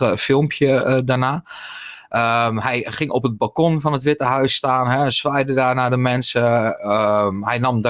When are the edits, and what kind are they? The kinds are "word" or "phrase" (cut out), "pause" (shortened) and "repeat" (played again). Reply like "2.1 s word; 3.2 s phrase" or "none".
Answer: none